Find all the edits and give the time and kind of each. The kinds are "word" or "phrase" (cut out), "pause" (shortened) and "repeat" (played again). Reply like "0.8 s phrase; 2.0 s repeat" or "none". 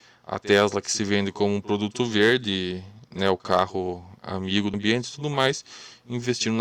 4.7 s word